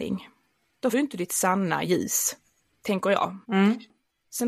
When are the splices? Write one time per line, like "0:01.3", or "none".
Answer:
0:00.9
0:01.9
0:03.4